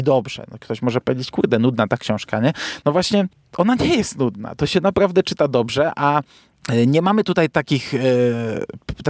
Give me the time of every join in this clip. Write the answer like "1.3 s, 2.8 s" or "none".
none